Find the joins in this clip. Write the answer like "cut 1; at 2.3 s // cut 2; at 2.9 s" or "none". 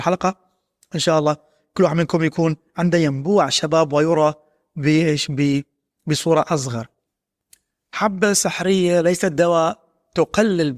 none